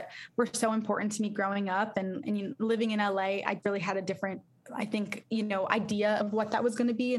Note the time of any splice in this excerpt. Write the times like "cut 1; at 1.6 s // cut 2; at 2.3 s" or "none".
cut 1; at 3.6 s // cut 2; at 6.2 s